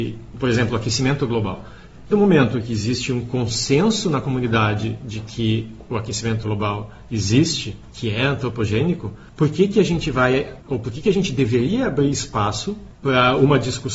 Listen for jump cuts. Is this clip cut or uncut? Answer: cut